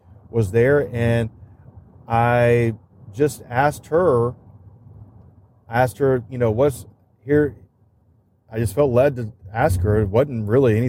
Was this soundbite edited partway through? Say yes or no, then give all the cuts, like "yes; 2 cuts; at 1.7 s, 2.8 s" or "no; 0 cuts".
no; 0 cuts